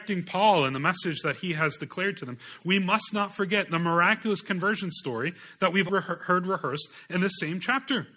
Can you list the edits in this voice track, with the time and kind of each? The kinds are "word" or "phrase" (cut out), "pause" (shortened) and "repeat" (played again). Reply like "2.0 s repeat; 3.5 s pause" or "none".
5.9 s word